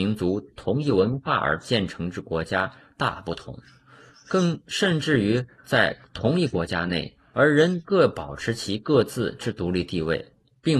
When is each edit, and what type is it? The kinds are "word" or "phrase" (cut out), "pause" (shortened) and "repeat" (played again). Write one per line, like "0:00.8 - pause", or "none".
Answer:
none

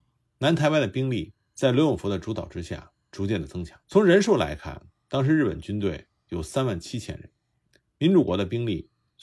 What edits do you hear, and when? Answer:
0:03.8 - pause

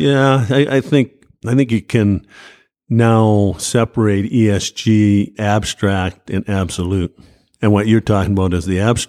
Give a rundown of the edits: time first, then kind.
0:05.3 - word

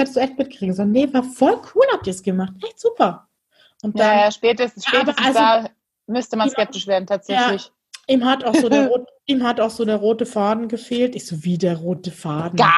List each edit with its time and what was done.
none

